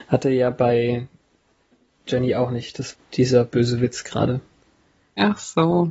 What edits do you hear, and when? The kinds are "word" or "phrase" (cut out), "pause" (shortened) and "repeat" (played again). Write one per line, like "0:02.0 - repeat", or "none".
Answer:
0:02.9 - word